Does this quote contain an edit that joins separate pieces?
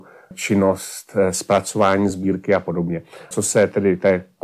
no; 0 cuts

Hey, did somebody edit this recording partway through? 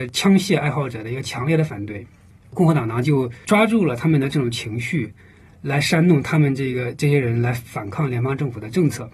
no; 0 cuts

